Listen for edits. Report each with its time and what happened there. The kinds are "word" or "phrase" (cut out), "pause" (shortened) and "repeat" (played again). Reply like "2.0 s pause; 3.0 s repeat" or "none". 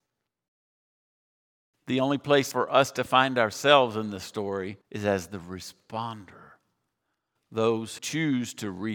2.5 s word; 4.8 s pause; 8.0 s word